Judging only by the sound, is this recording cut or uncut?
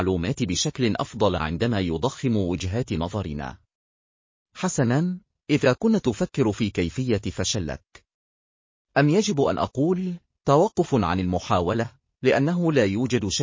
uncut